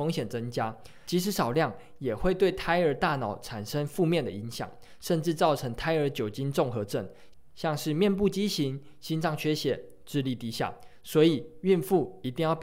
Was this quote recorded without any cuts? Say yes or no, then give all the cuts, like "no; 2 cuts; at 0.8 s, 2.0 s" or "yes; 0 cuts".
no; 1 cut; at 7.5 s